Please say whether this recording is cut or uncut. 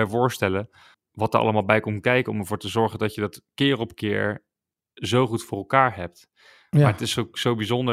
cut